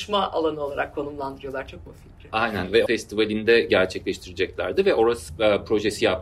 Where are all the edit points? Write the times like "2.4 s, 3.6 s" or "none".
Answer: 1.9 s, 2.9 s, 5.3 s

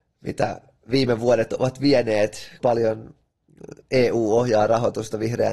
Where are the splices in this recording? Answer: 2.6 s

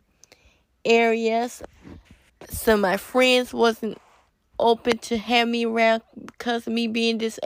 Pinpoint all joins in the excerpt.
none

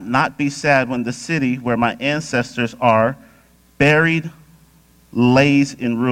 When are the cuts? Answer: none

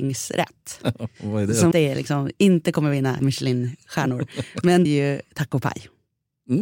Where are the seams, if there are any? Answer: 1.7 s, 3.2 s, 4.9 s

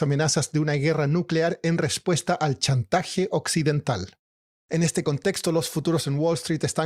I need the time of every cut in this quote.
none

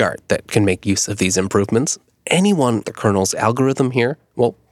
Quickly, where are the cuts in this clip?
2.8 s

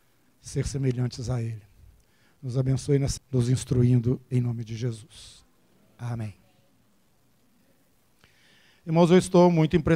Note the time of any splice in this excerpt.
3.2 s

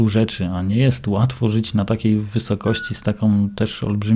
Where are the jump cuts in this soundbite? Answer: none

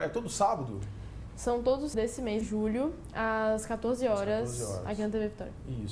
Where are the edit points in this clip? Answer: 1.9 s, 2.4 s

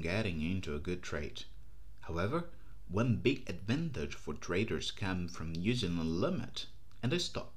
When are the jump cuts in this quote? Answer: none

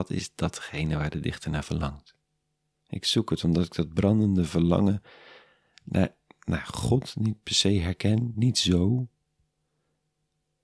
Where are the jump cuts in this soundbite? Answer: none

